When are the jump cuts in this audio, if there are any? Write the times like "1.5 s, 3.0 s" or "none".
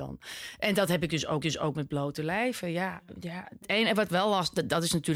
1.4 s